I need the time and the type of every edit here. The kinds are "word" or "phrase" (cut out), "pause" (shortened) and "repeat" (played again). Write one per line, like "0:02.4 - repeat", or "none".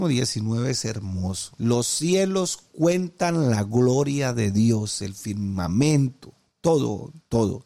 0:01.5 - pause